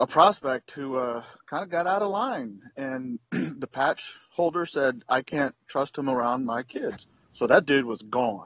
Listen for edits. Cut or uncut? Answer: uncut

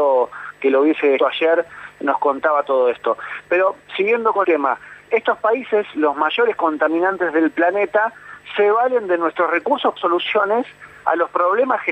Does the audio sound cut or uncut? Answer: cut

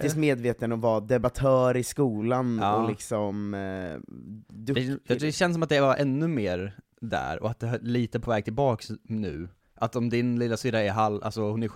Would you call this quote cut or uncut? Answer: uncut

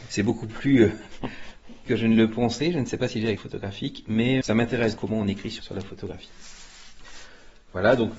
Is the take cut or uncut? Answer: cut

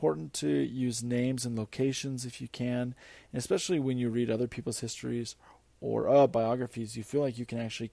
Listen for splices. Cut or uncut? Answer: uncut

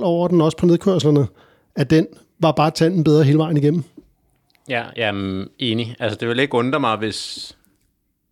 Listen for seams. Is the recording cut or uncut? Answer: uncut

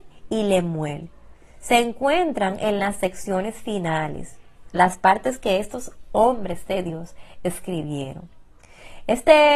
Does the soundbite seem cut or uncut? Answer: uncut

